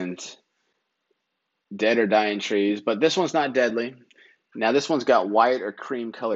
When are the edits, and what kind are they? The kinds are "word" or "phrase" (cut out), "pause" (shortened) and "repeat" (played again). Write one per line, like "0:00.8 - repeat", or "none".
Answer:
none